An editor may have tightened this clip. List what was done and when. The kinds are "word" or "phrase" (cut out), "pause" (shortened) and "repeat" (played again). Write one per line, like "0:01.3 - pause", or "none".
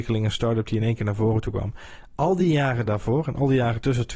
none